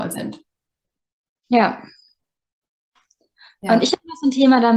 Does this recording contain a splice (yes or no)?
no